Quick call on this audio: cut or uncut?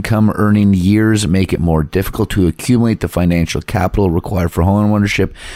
uncut